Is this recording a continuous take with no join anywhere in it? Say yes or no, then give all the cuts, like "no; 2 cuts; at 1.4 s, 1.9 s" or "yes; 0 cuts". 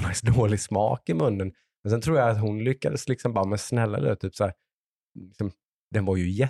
yes; 0 cuts